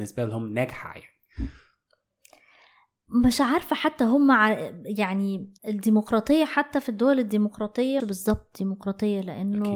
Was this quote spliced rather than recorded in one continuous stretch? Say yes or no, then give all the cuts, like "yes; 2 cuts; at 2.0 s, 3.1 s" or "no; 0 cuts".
yes; 2 cuts; at 5.6 s, 8.0 s